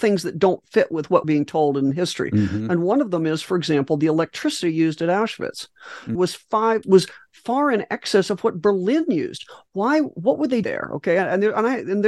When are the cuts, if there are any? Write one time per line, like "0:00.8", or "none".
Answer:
0:01.2
0:06.1
0:06.8
0:10.6